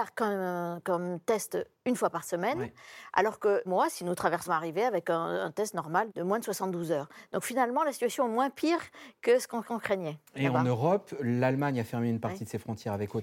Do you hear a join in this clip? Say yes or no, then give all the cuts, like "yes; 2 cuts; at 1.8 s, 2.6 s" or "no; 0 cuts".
yes; 4 cuts; at 3.7 s, 4.5 s, 6.1 s, 9.6 s